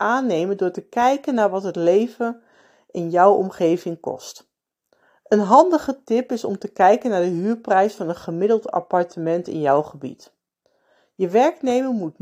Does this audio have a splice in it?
no; 0 cuts

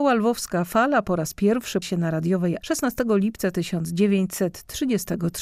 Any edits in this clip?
yes; 2 cuts; at 1.8 s, 2.6 s

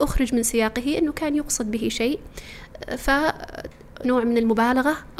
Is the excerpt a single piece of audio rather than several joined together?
no; 1 cut; at 4.0 s

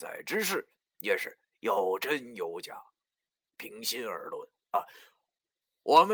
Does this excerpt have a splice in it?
no; 0 cuts

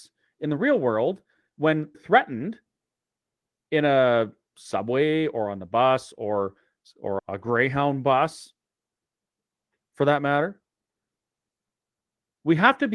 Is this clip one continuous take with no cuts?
no; 2 cuts; at 1.9 s, 7.2 s

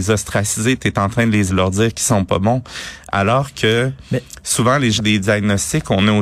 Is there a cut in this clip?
yes; 2 cuts; at 1.5 s, 5.0 s

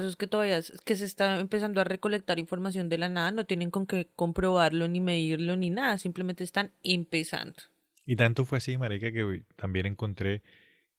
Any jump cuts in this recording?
no; 0 cuts

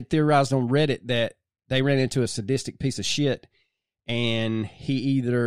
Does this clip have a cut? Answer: no; 0 cuts

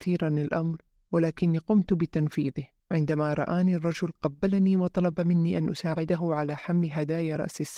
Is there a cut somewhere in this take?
yes; 1 cut; at 2.8 s

